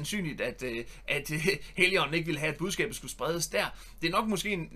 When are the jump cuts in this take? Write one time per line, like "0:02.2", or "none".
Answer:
none